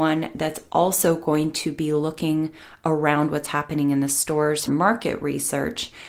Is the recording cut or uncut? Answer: cut